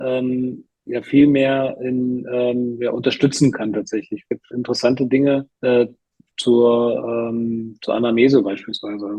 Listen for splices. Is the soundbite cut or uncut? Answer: cut